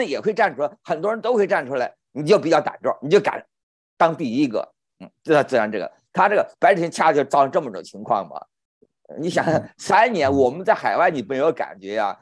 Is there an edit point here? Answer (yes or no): no